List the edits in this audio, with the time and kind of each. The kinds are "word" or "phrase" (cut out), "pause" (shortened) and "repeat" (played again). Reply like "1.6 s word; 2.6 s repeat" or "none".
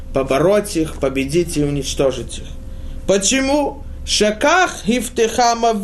none